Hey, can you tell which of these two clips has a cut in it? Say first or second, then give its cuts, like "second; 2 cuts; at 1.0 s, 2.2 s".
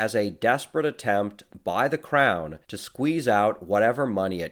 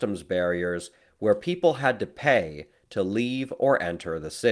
first; 1 cut; at 2.6 s